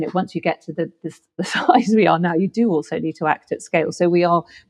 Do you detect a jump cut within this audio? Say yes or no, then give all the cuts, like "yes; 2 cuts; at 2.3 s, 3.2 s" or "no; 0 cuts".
no; 0 cuts